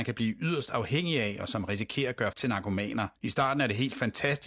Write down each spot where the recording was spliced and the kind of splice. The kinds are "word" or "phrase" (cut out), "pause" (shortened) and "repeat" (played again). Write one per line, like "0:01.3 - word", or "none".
0:02.3 - word
0:03.2 - pause